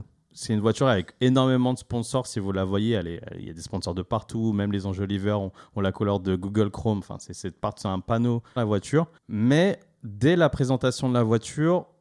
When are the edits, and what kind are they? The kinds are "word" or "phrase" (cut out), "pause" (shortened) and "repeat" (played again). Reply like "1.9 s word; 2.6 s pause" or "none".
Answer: 3.2 s word; 8.6 s phrase; 9.2 s pause